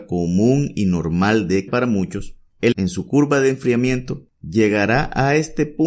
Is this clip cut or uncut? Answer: cut